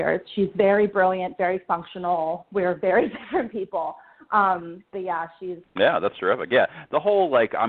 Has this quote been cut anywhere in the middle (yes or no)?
yes